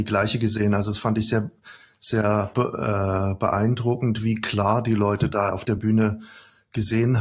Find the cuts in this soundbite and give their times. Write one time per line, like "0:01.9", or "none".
none